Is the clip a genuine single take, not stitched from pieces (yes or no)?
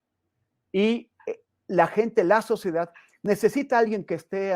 yes